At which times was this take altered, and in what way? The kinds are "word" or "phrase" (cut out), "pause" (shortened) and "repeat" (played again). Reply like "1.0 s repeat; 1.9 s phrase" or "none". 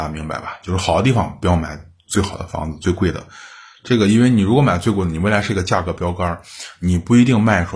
none